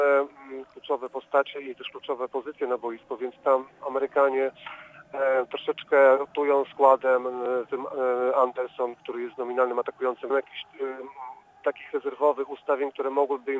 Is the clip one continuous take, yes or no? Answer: no